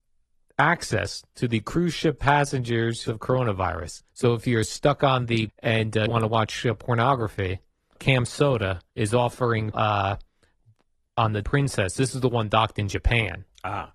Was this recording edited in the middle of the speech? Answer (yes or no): yes